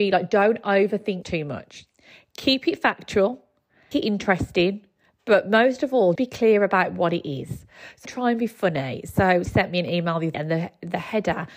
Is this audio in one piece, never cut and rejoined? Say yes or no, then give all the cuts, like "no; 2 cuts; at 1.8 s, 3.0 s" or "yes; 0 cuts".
no; 6 cuts; at 1.2 s, 3.9 s, 6.2 s, 8.1 s, 9.5 s, 10.3 s